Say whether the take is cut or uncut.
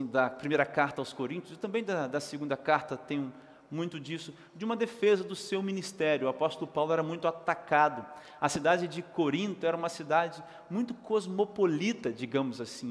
uncut